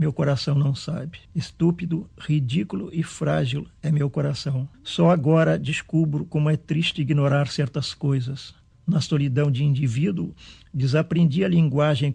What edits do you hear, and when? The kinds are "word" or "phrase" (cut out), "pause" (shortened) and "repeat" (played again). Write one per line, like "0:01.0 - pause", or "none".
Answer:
0:01.3 - pause
0:04.7 - pause
0:08.7 - pause